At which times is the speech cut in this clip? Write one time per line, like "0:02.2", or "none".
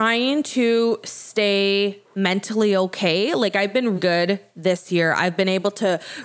0:04.0

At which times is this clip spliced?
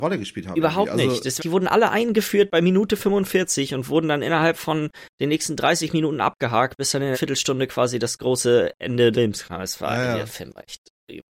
0:01.4
0:07.1
0:09.1

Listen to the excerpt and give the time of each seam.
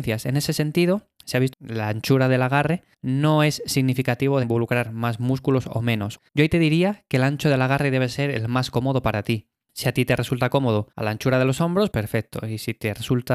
0:01.5
0:02.9
0:04.4
0:06.3
0:10.9
0:11.9

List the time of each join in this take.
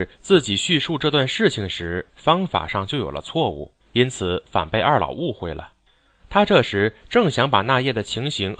0:03.8
0:05.9

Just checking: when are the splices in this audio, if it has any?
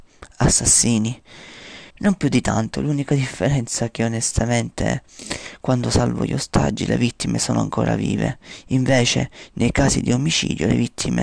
0:01.9

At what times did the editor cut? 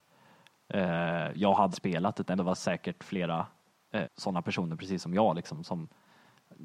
0:01.7
0:02.4
0:04.0

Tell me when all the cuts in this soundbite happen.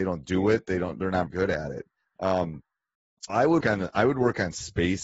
0:01.3
0:03.3
0:03.6

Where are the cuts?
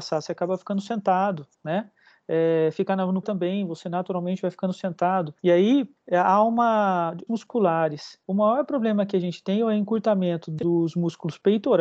0:01.5
0:03.2
0:05.4
0:06.0
0:07.3
0:08.2

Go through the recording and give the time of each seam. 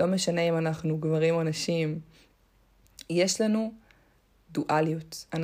none

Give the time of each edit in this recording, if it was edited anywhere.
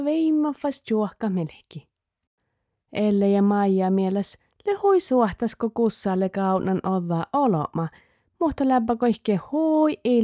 none

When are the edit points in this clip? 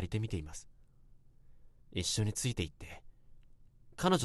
0:01.8

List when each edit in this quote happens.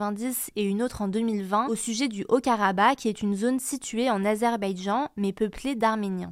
none

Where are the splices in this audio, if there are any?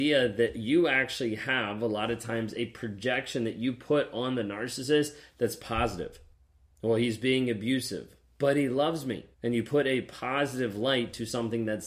0:06.3
0:09.3

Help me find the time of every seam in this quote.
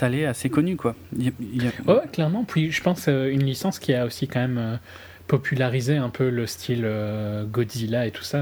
none

